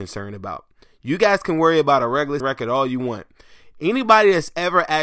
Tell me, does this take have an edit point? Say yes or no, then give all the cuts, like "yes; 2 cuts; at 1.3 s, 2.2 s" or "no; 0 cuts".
yes; 1 cut; at 2.4 s